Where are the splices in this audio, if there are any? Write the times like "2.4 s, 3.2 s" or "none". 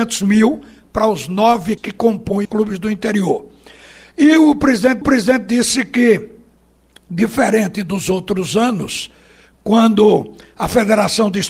1.8 s, 2.4 s, 5.0 s